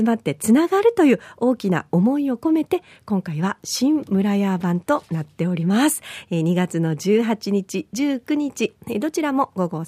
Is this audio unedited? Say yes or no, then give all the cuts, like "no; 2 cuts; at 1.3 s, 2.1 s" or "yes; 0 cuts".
yes; 0 cuts